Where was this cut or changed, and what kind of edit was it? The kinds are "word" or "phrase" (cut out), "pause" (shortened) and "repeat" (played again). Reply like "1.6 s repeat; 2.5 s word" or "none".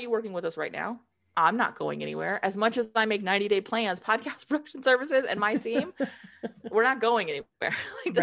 none